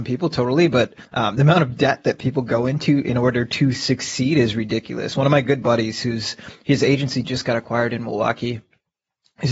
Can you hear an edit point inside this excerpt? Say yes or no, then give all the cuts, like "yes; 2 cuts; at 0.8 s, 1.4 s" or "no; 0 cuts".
yes; 1 cut; at 1.0 s